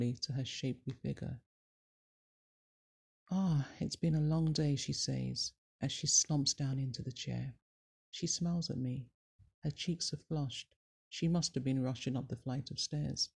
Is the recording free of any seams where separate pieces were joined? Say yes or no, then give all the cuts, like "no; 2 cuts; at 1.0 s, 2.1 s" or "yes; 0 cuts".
yes; 0 cuts